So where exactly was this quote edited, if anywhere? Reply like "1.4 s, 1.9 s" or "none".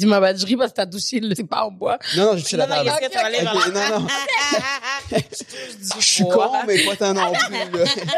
1.4 s